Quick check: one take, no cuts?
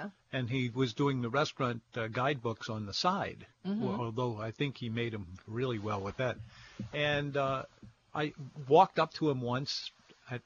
yes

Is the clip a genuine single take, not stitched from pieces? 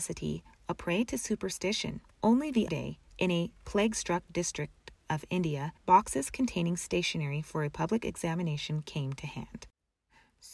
no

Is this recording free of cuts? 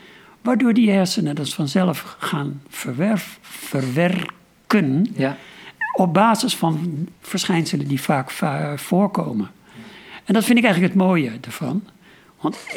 no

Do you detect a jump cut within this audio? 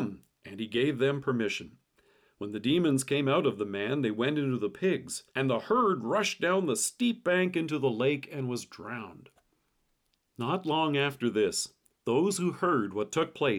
yes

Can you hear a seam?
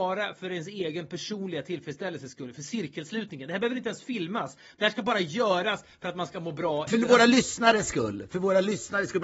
yes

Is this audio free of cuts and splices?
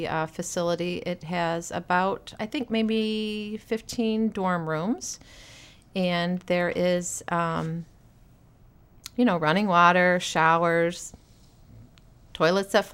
yes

